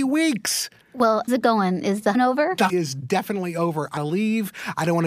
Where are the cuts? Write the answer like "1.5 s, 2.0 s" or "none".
1.3 s, 2.1 s, 2.7 s, 4.0 s